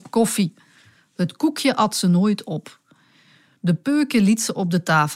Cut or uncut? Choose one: uncut